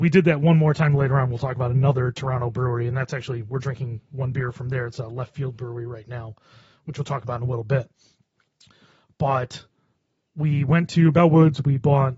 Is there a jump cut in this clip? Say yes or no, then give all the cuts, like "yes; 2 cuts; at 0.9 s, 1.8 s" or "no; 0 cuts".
no; 0 cuts